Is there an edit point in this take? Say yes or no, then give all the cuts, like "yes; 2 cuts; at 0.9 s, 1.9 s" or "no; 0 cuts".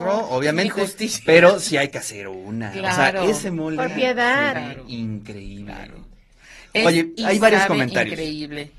no; 0 cuts